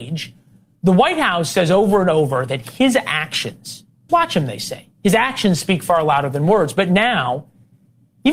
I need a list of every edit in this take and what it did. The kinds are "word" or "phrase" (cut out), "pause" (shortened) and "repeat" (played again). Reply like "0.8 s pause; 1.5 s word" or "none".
4.1 s word